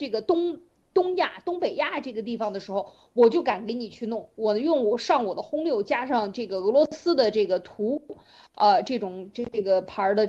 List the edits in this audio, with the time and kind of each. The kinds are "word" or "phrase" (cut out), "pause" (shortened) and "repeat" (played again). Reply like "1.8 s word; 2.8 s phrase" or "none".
none